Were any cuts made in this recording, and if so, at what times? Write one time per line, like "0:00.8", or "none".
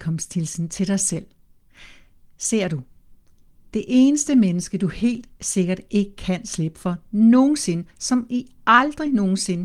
none